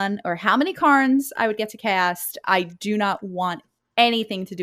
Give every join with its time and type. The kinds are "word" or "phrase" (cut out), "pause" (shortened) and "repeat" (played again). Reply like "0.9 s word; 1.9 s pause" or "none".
none